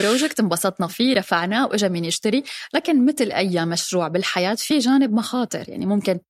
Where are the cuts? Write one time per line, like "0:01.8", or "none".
none